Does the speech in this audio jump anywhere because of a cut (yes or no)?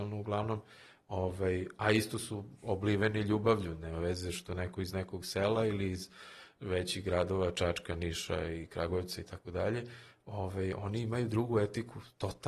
no